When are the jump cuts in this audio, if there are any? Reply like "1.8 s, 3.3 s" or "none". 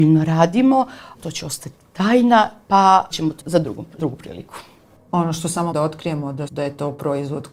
1.2 s, 3.1 s, 3.4 s, 4.0 s, 5.7 s, 6.5 s